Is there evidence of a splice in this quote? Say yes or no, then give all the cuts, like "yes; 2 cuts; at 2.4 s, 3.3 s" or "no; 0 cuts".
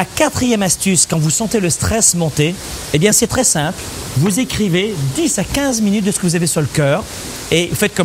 no; 0 cuts